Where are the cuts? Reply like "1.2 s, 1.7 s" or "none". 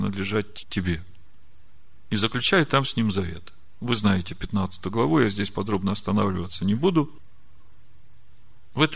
none

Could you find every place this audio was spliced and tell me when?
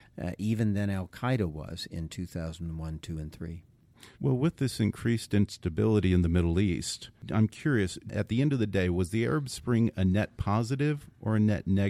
4.1 s

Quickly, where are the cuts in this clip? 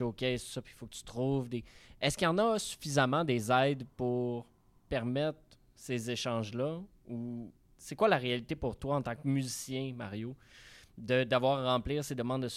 none

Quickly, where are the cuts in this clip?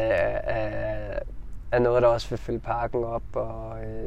2.4 s

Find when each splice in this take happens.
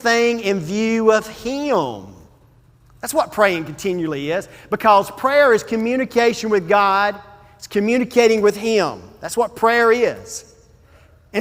none

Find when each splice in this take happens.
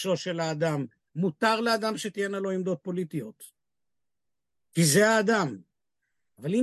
none

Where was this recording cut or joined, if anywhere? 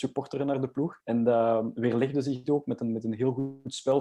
1.0 s

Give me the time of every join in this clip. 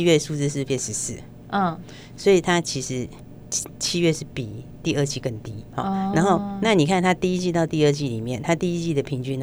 none

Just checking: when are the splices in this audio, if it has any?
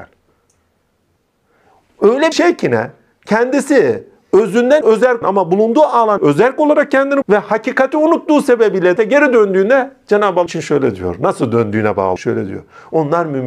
2.3 s, 4.8 s, 5.2 s, 6.2 s, 7.2 s, 9.0 s, 10.5 s, 12.2 s

